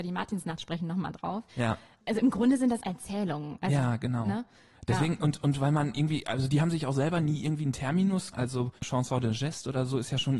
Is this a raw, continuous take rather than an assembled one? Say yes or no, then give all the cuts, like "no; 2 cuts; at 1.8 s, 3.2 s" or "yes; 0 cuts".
no; 4 cuts; at 1.5 s, 2.8 s, 8.3 s, 8.8 s